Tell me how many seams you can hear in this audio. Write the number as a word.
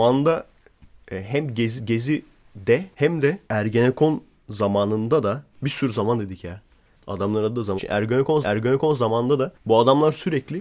seven